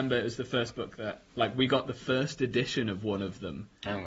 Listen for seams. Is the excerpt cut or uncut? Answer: cut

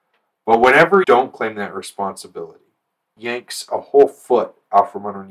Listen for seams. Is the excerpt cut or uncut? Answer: cut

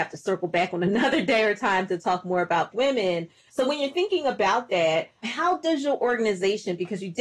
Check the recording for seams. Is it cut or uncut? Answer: cut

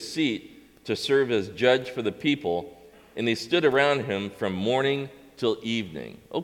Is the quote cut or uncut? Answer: uncut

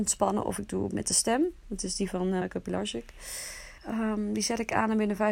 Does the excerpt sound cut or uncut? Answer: cut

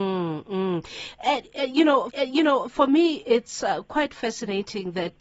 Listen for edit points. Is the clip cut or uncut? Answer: cut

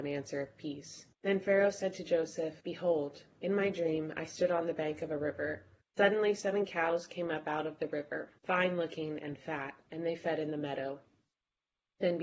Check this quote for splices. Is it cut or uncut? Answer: cut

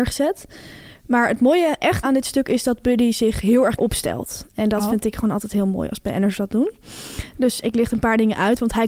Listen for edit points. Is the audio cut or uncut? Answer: cut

